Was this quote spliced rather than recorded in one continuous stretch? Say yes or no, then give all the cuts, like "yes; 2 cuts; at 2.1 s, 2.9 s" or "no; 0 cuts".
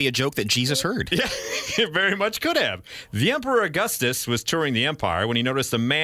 no; 0 cuts